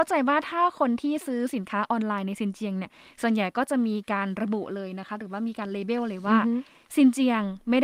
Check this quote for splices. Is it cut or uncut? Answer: uncut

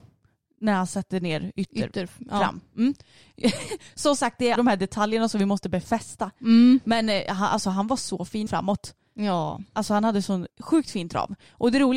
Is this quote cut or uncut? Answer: cut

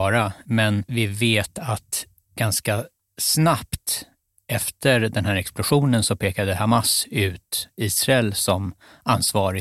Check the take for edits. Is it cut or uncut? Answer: uncut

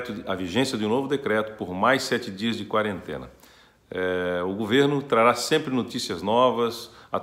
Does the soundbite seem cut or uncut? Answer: uncut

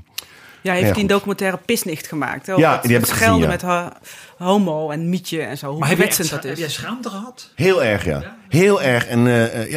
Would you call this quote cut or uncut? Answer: cut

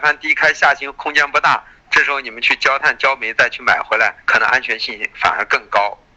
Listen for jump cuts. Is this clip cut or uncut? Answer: cut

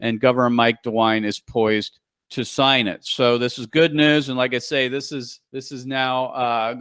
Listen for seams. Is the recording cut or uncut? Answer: cut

